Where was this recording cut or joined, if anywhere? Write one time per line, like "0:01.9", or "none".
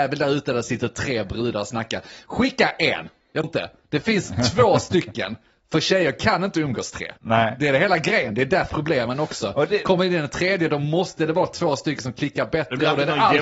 0:03.4
0:07.2
0:08.7